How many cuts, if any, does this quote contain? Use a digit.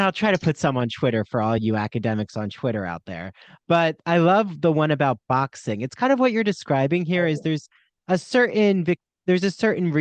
0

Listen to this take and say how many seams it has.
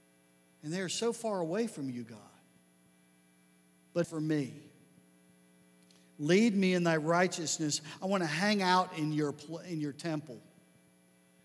1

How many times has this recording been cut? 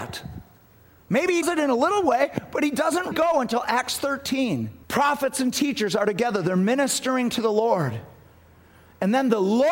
3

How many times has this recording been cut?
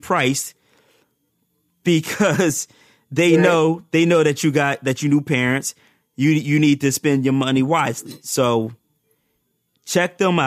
0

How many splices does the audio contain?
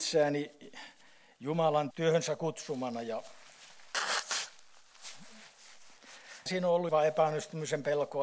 3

